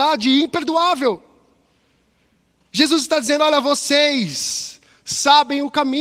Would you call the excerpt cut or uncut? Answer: uncut